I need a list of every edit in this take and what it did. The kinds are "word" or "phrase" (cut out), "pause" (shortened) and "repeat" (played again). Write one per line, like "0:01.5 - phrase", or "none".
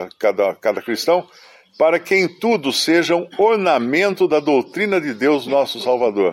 none